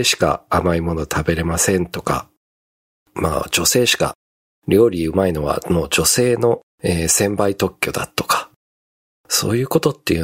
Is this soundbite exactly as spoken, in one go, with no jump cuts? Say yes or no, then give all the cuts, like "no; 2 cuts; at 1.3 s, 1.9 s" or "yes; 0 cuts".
yes; 0 cuts